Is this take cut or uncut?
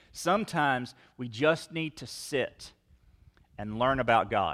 uncut